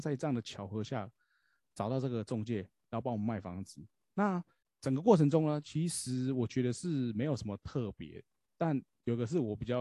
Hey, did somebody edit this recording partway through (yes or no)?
no